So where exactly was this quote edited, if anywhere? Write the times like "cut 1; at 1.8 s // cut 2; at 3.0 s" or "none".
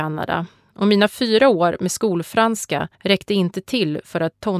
cut 1; at 2.9 s